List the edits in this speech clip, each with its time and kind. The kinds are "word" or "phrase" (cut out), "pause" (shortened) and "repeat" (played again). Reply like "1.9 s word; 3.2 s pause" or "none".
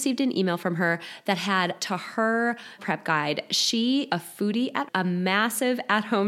1.8 s phrase; 2.8 s word; 4.1 s word; 4.9 s word